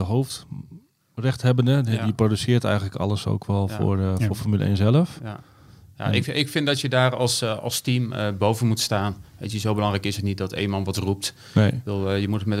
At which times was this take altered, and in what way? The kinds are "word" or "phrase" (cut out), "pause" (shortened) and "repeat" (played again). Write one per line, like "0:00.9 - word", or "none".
none